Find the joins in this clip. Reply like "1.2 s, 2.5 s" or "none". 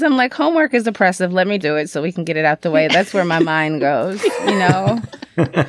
1.6 s